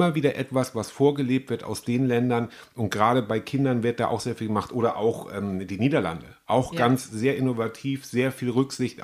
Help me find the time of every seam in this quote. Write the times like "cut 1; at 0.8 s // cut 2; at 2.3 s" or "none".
none